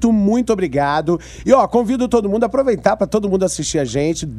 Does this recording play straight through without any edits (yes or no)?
yes